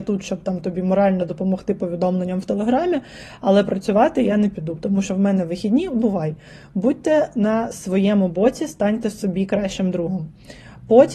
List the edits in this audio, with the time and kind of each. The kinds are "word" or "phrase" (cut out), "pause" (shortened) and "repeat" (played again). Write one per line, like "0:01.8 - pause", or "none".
none